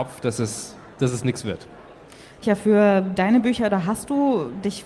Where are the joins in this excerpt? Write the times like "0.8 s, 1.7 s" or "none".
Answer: 2.4 s